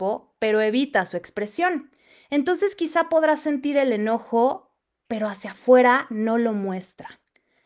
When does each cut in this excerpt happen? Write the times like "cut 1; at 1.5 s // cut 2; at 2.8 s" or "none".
none